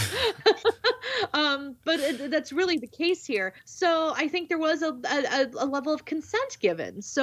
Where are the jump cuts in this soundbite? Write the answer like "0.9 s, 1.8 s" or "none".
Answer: 3.6 s